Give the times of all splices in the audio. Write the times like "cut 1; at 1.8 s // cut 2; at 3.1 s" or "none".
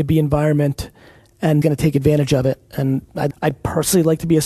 cut 1; at 1.6 s // cut 2; at 2.7 s // cut 3; at 3.3 s